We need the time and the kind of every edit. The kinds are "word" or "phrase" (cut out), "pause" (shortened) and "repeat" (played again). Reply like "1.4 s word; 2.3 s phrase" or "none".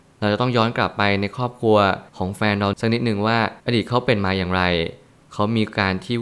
2.1 s pause; 3.6 s pause

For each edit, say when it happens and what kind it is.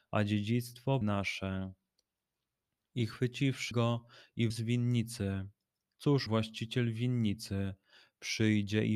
1.0 s word; 3.7 s word; 4.5 s word; 6.3 s word

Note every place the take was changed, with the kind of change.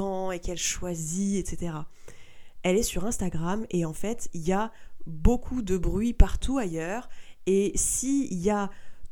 none

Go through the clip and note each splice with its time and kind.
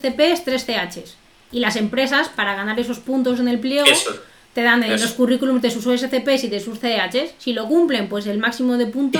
none

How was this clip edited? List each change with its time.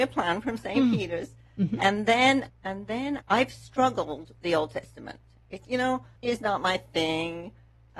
2.5 s word; 3.2 s word; 4.3 s word; 5.6 s word; 6.2 s word

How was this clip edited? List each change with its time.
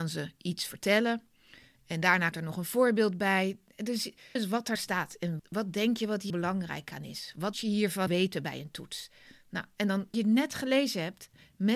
2.3 s word; 4.4 s word; 4.8 s word; 5.4 s word; 6.3 s word; 7.5 s word; 8.1 s word; 10.1 s word

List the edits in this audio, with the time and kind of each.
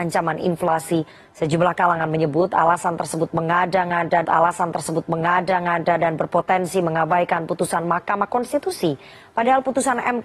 4.2 s repeat

